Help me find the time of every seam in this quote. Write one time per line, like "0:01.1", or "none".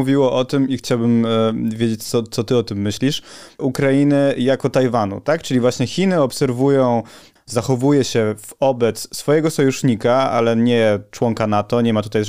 0:03.6
0:07.4